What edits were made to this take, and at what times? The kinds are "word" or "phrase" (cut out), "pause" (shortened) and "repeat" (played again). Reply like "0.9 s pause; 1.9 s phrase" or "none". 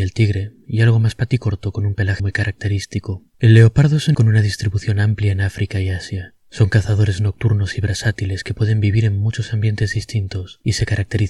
2.2 s word; 3.3 s pause; 4.1 s word